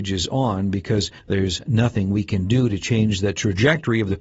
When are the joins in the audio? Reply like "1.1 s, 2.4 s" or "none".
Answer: 1.2 s